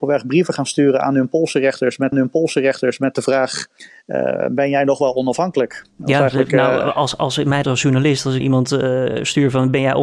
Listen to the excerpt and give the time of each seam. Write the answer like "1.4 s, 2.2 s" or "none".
2.1 s, 7.6 s, 8.4 s